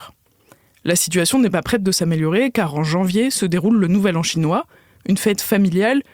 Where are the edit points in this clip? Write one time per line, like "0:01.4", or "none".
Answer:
none